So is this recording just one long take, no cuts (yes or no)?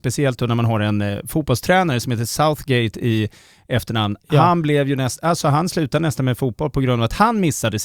yes